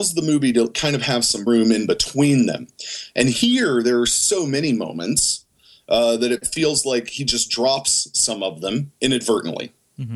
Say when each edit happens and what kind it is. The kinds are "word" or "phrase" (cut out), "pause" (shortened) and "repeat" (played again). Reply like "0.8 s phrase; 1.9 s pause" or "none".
1.5 s word

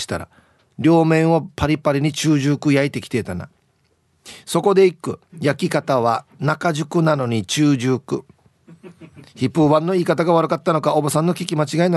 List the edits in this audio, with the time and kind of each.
5.3 s pause

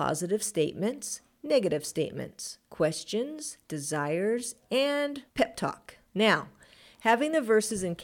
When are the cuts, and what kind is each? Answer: 2.6 s pause; 5.3 s pause; 6.1 s pause

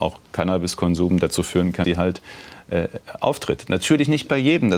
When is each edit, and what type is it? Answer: 1.8 s word

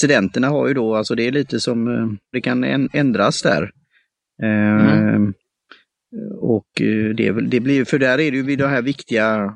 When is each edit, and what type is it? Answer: 2.3 s phrase

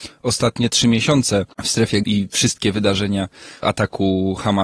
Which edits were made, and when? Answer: 1.5 s pause; 2.0 s word; 3.6 s word

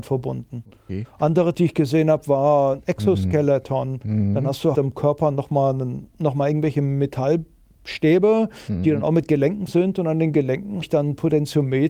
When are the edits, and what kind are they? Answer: 1.5 s word; 4.7 s word; 6.1 s pause; 9.7 s word; 10.8 s word

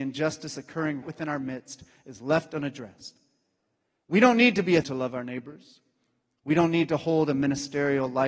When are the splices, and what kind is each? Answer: 1.0 s word; 4.8 s word

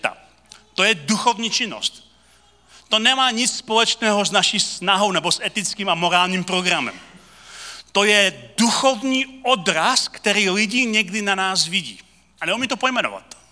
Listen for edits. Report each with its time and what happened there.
none

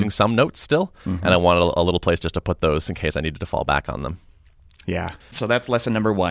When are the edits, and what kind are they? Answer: 1.0 s pause; 5.2 s pause

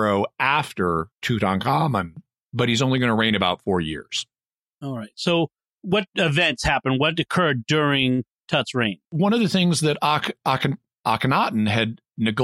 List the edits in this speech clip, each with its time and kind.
1.1 s pause; 9.0 s pause

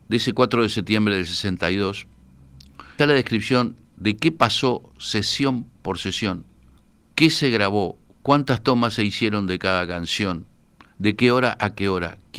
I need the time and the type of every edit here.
3.0 s word; 3.8 s pause; 6.8 s pause

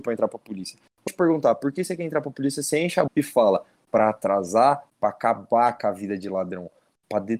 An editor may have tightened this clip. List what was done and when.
1.1 s word; 3.1 s word; 4.9 s word

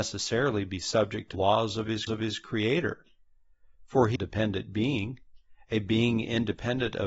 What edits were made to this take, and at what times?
1.3 s word; 2.1 s repeat; 4.2 s phrase

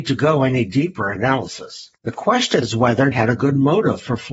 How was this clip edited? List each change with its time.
1.1 s word; 2.0 s pause; 2.6 s word; 3.1 s word

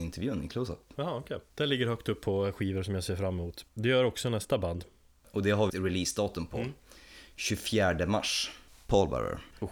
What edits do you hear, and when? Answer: 1.5 s pause; 3.7 s pause; 5.7 s phrase

